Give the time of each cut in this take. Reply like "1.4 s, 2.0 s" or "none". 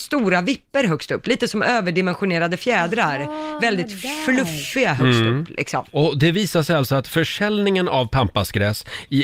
3.6 s